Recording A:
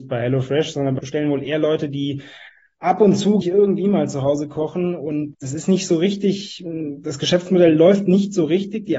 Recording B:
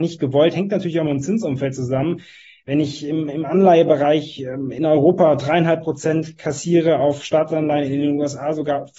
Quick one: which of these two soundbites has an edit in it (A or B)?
A